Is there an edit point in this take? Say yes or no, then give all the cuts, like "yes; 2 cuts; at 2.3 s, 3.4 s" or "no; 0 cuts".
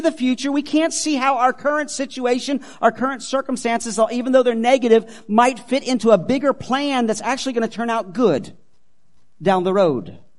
no; 0 cuts